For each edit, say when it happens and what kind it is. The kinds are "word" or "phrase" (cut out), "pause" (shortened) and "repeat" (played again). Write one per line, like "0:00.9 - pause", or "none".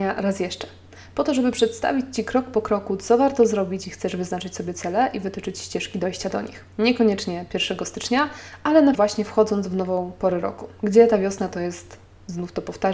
0:03.8 - word
0:06.7 - pause
0:08.9 - word